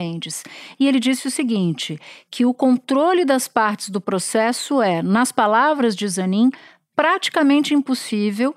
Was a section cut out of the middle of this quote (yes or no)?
no